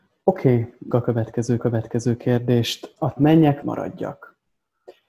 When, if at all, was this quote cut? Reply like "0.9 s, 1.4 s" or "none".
0.9 s, 1.6 s, 3.2 s, 3.6 s